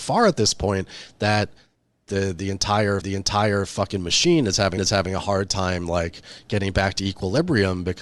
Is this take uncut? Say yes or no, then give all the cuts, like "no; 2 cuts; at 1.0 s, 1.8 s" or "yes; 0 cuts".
no; 2 cuts; at 3.0 s, 4.8 s